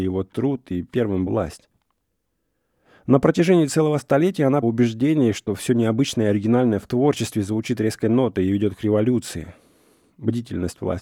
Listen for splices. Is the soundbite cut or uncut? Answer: cut